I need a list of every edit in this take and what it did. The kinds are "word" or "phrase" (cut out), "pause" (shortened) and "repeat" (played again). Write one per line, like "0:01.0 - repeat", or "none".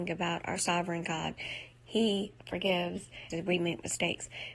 0:03.3 - phrase